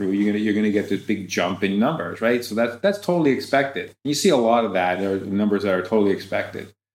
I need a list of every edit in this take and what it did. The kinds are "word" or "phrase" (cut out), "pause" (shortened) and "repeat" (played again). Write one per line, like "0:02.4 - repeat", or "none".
0:04.0 - pause